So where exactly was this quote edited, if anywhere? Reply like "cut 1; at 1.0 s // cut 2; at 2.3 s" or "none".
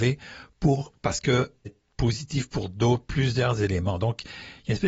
cut 1; at 1.7 s